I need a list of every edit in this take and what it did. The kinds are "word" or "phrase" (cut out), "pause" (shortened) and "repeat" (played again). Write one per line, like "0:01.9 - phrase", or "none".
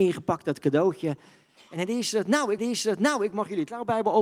0:02.6 - repeat